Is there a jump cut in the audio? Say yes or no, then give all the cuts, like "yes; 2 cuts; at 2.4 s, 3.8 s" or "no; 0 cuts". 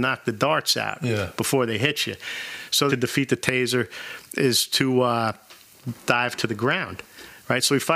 yes; 1 cut; at 2.9 s